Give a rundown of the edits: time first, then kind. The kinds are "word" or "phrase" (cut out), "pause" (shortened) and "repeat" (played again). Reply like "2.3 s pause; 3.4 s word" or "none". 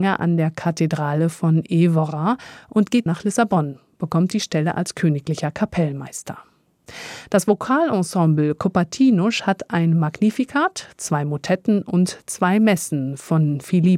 3.1 s word